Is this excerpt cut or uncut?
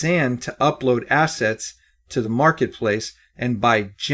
uncut